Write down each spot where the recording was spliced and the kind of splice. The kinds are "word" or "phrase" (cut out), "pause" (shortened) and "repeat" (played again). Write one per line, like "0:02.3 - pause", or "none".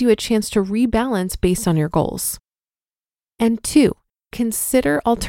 none